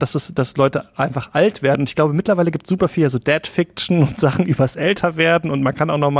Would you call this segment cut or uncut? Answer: uncut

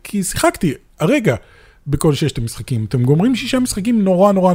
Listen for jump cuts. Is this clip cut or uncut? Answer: uncut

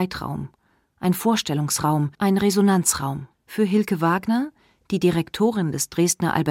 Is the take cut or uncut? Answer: cut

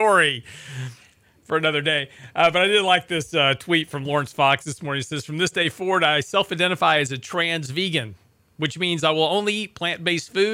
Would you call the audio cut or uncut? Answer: uncut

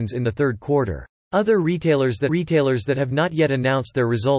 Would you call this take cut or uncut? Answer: cut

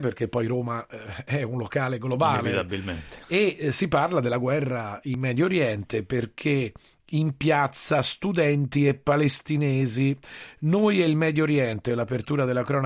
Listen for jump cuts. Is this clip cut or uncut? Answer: uncut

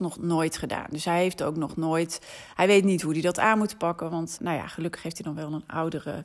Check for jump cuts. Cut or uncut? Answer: cut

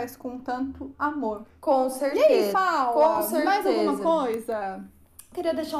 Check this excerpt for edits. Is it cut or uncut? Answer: cut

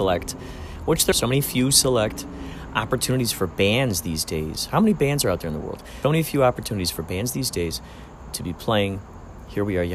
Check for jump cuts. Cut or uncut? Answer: cut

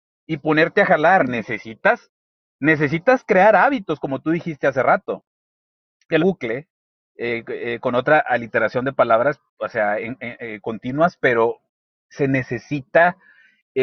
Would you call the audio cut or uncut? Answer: cut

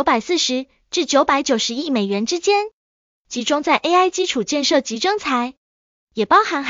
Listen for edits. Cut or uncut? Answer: uncut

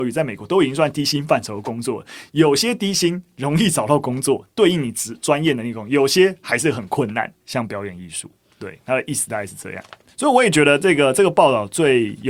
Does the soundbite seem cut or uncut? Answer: uncut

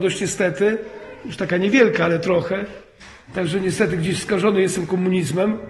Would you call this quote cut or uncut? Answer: uncut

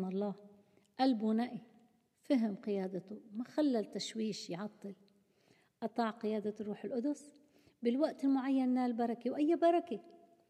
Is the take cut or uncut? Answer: uncut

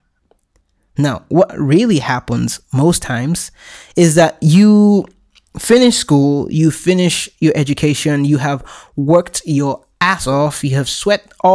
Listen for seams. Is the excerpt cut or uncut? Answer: uncut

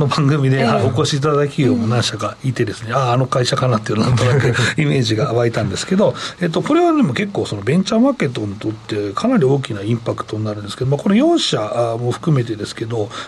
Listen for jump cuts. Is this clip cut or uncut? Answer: uncut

